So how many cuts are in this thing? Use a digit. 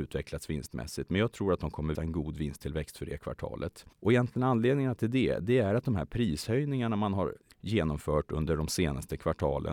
3